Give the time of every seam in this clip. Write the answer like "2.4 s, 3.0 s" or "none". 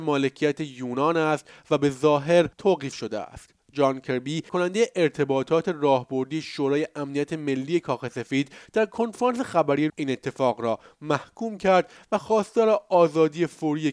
2.5 s, 4.5 s, 9.9 s